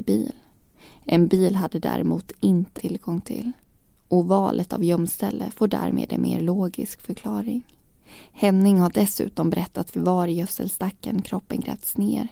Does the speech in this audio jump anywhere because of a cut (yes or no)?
yes